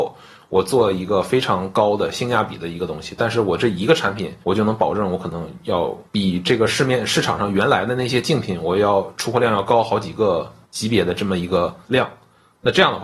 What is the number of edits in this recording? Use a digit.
4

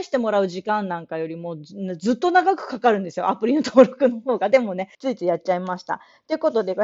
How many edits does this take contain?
1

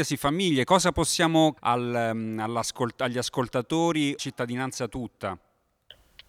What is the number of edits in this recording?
2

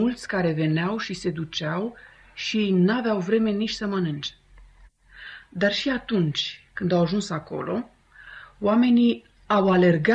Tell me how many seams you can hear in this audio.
0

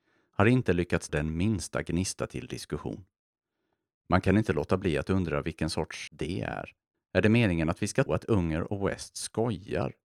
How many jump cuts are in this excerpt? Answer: 4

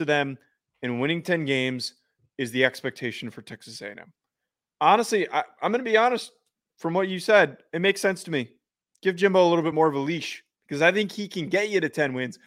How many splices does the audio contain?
0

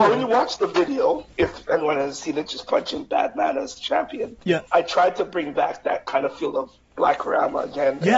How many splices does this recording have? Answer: 2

